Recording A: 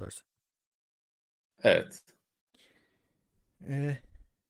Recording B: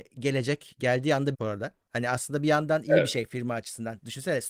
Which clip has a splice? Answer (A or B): B